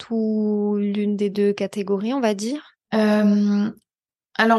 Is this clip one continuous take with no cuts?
yes; 0 cuts

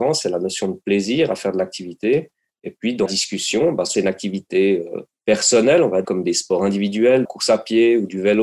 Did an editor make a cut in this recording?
yes; 4 cuts; at 3.1 s, 3.9 s, 6.0 s, 7.2 s

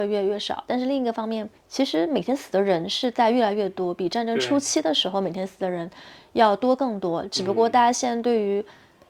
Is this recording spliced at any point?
yes; 1 cut; at 1.6 s

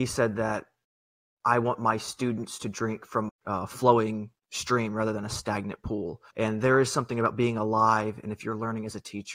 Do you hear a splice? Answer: yes; 2 cuts; at 3.3 s, 6.3 s

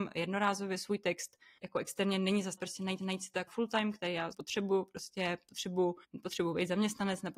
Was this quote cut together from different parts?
yes; 6 cuts; at 1.6 s, 2.6 s, 3.0 s, 3.5 s, 4.3 s, 6.0 s

